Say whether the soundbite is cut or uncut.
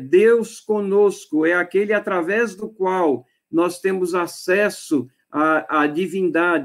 uncut